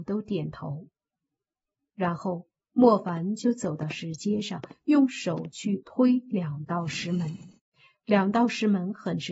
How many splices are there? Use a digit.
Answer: 0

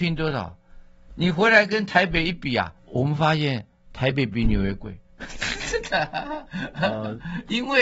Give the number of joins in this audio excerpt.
1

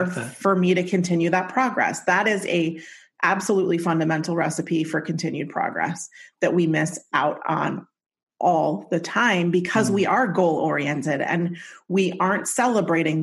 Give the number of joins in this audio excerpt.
0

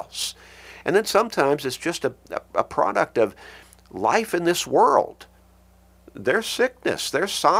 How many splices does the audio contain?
0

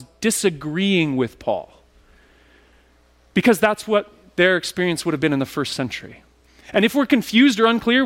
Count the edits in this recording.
0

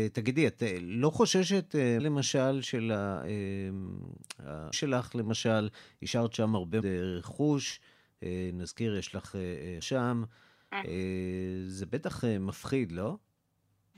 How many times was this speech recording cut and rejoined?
4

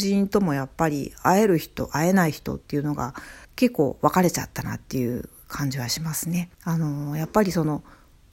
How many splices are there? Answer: 2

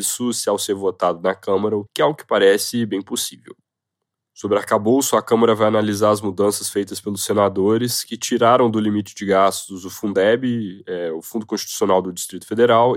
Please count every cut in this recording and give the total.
1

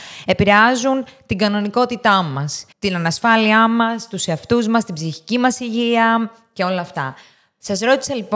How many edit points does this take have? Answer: 1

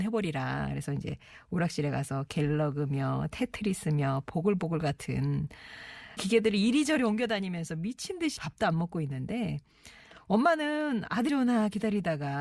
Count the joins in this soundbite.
3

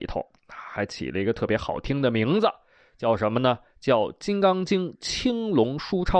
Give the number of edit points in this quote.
0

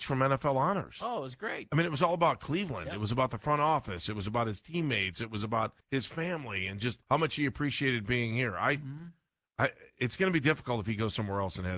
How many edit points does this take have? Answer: 2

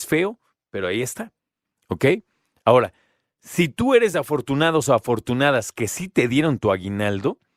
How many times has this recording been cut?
0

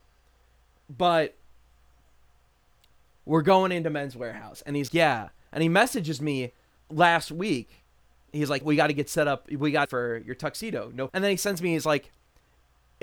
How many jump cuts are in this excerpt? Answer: 6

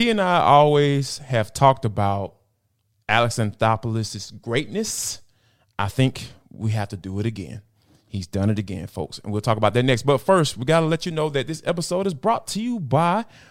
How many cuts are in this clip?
0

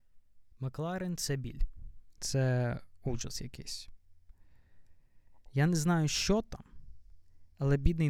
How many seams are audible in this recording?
0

